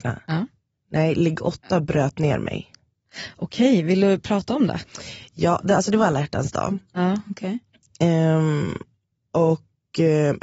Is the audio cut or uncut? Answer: uncut